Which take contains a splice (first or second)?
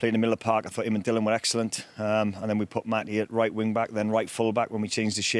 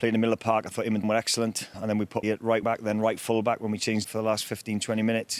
second